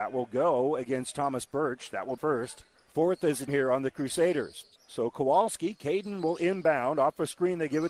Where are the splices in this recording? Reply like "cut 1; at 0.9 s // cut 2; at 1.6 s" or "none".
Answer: cut 1; at 2.2 s // cut 2; at 2.8 s // cut 3; at 3.5 s // cut 4; at 4.8 s

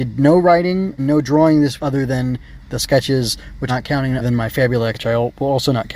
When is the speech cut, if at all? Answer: cut 1; at 1.0 s // cut 2; at 1.8 s // cut 3; at 3.7 s // cut 4; at 4.2 s // cut 5; at 4.9 s

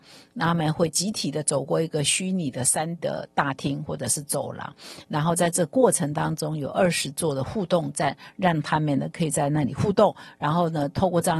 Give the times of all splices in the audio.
cut 1; at 3.0 s

